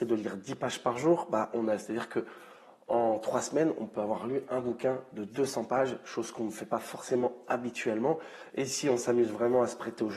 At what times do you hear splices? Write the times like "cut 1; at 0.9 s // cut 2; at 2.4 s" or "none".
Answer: none